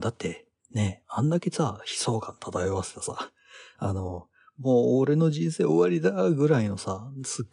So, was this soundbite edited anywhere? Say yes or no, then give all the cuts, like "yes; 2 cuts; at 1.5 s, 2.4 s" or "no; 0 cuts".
no; 0 cuts